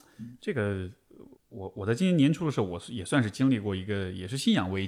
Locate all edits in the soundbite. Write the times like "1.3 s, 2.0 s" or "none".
1.4 s